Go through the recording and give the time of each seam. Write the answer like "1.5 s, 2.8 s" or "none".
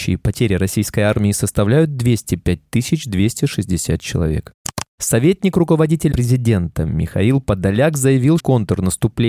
6.1 s, 8.4 s

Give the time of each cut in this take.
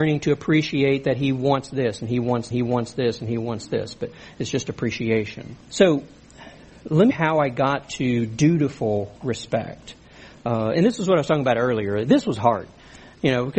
2.5 s, 5.6 s, 7.1 s, 10.7 s

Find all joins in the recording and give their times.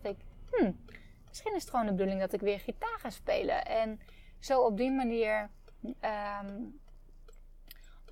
none

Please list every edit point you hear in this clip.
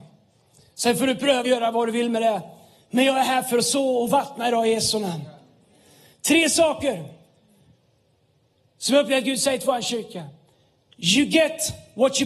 1.4 s

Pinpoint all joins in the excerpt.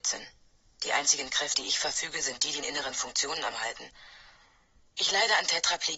1.5 s, 2.6 s, 3.5 s

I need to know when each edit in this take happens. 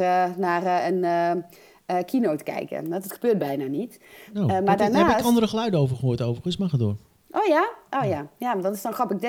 none

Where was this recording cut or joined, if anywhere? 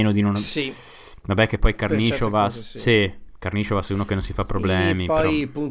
none

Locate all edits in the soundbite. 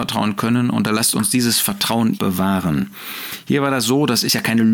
2.1 s

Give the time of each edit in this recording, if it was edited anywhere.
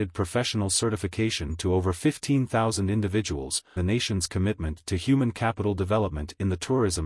3.8 s

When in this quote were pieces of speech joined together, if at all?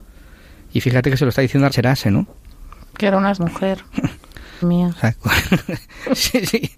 1.7 s, 3.4 s, 4.6 s

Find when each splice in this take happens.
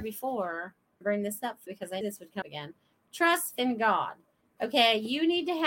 1.0 s, 1.7 s, 2.0 s, 2.4 s, 3.6 s

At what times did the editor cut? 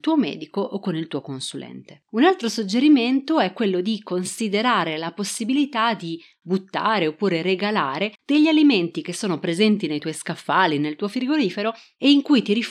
2.1 s, 8.1 s

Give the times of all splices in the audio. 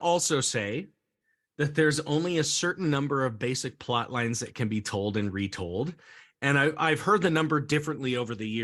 none

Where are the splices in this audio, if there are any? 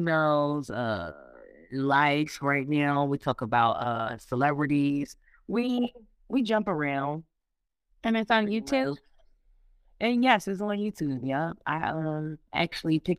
none

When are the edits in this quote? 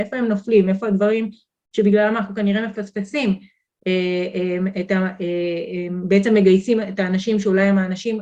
none

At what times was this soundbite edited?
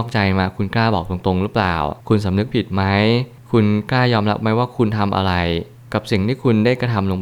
2.0 s

